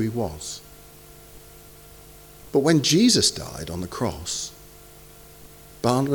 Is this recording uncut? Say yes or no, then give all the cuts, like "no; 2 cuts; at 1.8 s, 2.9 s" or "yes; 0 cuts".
yes; 0 cuts